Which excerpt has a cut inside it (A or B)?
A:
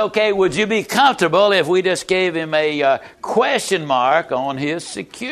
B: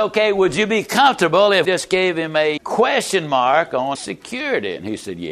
B